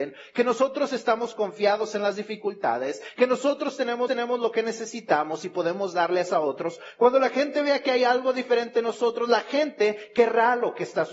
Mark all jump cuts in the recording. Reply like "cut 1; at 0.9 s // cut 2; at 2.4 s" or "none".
cut 1; at 4.1 s